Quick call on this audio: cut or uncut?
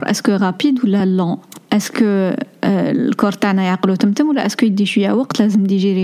uncut